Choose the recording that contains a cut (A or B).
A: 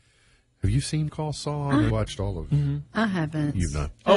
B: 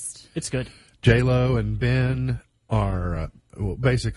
A